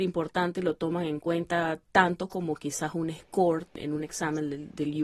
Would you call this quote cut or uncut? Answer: uncut